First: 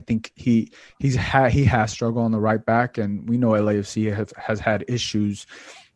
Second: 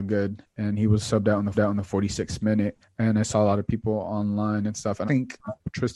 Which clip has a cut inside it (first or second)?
second